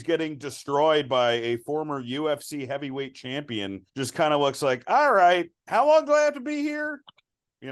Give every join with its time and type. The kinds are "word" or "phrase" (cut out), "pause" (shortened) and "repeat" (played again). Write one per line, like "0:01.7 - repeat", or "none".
0:03.9 - pause